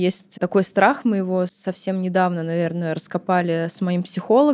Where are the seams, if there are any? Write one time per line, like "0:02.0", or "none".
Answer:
none